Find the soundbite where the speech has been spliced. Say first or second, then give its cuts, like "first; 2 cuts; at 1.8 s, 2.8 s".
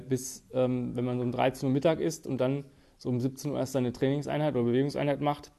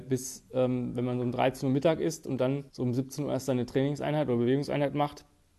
second; 1 cut; at 2.7 s